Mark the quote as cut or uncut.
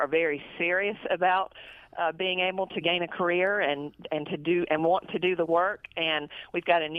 uncut